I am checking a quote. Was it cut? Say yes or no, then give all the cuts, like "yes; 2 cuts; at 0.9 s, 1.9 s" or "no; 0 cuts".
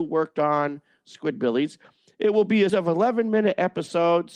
yes; 1 cut; at 2.7 s